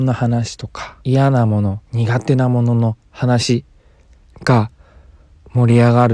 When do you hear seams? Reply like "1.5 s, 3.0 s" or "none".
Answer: 1.0 s, 1.9 s